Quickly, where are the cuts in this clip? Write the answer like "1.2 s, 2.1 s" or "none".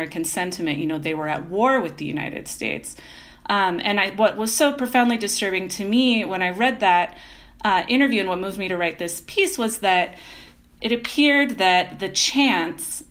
none